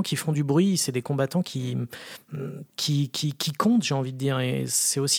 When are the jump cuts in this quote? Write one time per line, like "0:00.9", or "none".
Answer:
0:02.7